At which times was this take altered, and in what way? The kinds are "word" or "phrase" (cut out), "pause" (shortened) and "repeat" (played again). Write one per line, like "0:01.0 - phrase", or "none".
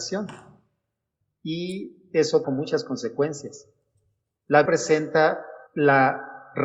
0:02.4 - word
0:04.7 - word
0:05.7 - pause